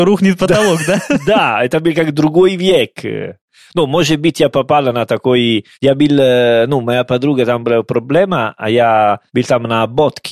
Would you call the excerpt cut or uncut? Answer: cut